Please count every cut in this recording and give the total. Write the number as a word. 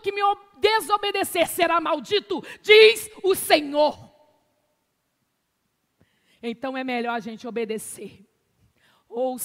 zero